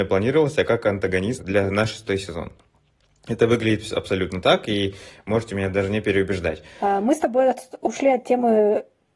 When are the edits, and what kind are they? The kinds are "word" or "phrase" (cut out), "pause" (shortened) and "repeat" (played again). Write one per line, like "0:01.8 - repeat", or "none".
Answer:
none